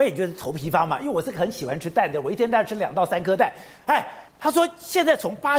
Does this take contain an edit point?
yes; 1 cut; at 4.3 s

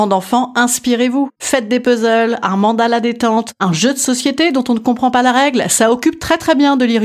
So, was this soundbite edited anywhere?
no; 0 cuts

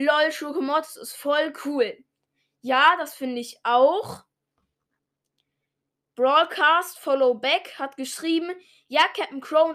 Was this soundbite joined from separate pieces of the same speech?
no; 0 cuts

